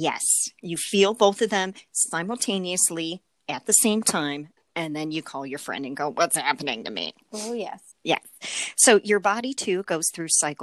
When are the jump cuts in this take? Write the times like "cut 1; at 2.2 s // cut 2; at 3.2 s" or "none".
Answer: cut 1; at 4.6 s // cut 2; at 7.9 s